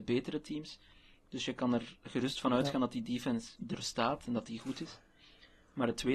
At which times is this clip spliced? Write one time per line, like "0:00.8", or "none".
0:03.6